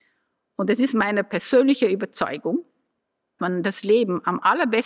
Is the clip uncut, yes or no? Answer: no